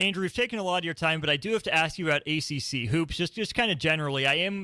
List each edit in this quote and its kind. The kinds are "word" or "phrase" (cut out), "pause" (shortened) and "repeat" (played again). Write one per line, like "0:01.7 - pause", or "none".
none